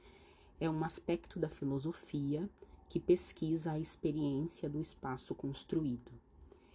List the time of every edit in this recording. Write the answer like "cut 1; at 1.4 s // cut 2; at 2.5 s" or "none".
none